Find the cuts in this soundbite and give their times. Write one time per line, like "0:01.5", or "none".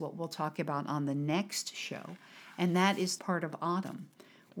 0:03.2